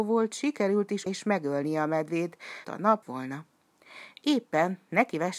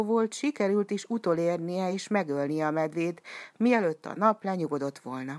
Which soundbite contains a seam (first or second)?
first